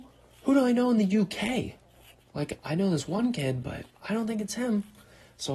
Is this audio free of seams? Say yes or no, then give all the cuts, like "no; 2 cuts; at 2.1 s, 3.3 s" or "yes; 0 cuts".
no; 1 cut; at 2.2 s